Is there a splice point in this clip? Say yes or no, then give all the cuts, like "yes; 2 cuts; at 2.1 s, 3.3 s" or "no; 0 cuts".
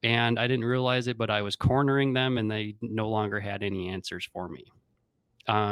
no; 0 cuts